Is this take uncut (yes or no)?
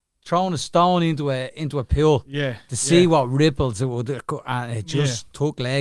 yes